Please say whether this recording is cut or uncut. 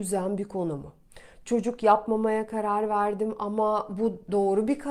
uncut